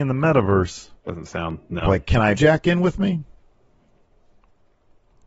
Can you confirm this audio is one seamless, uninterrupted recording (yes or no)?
no